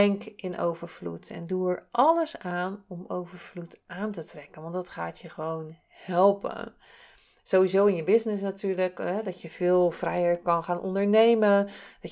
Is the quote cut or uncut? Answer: uncut